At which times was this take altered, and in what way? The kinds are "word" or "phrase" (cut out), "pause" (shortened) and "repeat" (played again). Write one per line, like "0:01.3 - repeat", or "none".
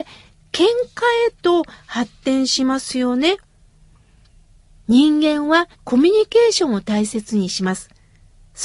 0:05.7 - pause